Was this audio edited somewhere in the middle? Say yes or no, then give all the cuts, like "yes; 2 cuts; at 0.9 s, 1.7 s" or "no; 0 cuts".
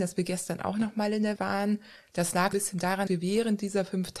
yes; 3 cuts; at 1.4 s, 2.5 s, 3.1 s